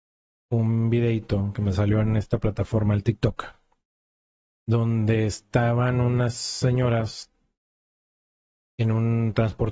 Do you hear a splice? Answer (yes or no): no